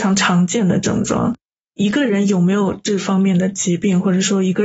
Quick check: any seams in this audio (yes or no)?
no